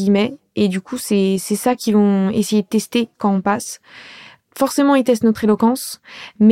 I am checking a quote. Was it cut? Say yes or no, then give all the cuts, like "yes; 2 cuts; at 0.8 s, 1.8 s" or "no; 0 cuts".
no; 0 cuts